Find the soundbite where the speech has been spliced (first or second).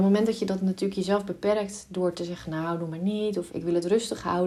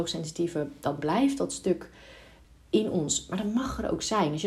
first